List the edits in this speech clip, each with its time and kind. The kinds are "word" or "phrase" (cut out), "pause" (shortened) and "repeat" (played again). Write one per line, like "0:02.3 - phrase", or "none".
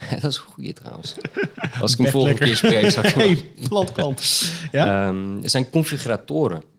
none